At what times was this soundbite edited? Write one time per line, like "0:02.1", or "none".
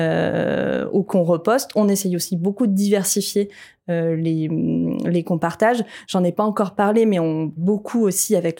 0:01.0
0:05.2
0:07.6